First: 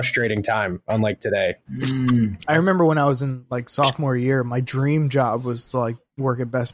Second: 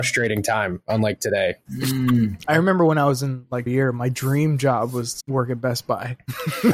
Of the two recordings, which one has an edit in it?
second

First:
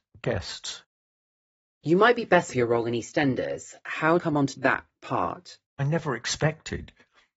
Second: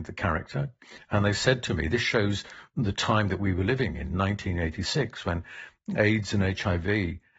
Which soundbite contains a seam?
first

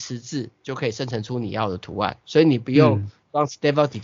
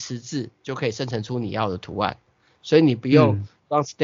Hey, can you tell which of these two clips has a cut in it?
first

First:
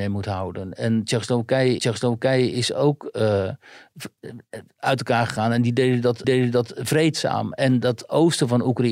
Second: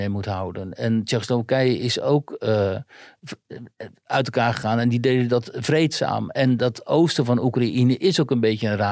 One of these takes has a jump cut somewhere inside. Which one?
first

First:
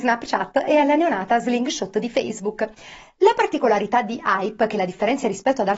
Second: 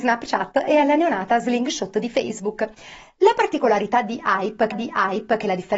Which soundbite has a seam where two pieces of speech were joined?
second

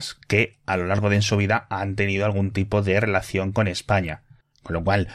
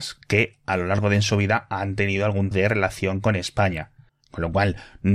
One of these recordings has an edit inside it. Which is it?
second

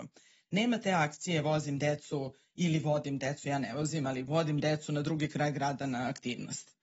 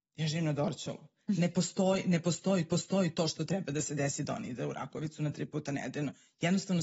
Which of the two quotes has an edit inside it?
second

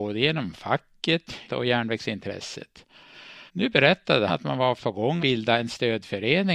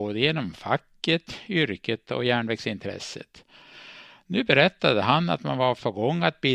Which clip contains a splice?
first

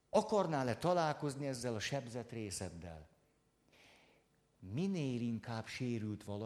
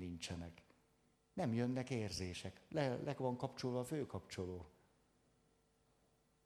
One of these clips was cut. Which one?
second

